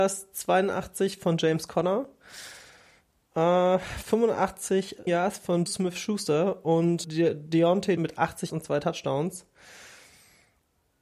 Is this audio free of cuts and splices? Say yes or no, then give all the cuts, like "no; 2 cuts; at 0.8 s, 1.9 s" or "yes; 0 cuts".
no; 5 cuts; at 5.1 s, 5.7 s, 7.0 s, 8.0 s, 8.5 s